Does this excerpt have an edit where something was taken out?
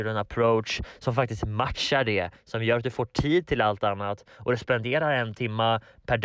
no; 0 cuts

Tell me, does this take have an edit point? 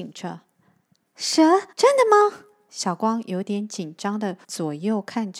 yes; 2 cuts; at 1.7 s, 4.4 s

